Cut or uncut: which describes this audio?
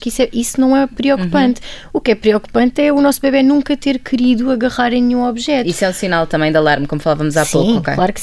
uncut